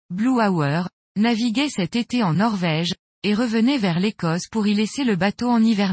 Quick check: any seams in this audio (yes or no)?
no